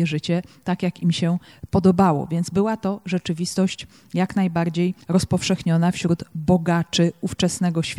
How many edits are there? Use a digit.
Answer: 1